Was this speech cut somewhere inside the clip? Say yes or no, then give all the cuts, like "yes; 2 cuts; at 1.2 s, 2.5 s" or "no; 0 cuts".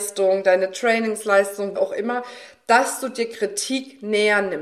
yes; 1 cut; at 1.8 s